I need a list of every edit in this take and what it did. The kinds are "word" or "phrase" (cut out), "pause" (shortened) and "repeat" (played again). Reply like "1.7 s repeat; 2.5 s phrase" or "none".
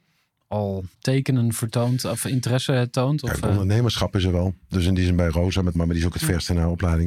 0.9 s pause; 5.7 s word